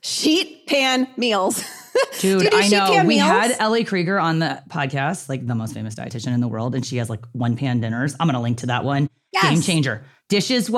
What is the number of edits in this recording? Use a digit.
0